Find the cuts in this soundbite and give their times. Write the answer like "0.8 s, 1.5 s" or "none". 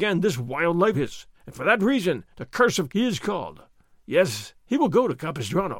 0.9 s, 1.3 s, 2.3 s, 2.9 s, 4.6 s